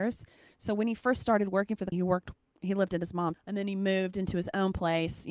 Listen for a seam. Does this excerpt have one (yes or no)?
yes